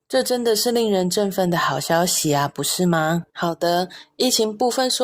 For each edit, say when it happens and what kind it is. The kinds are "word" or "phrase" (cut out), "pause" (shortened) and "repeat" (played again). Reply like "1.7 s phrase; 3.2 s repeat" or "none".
3.3 s pause